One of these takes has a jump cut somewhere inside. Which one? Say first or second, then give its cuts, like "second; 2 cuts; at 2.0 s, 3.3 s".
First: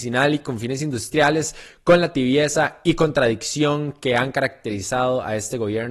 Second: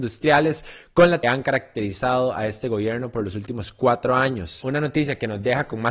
second; 1 cut; at 1.2 s